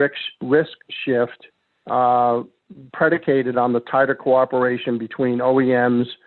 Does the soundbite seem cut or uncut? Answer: uncut